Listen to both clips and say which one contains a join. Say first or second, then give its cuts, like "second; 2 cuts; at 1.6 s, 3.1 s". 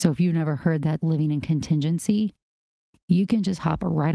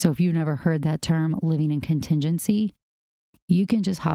first; 1 cut; at 1.0 s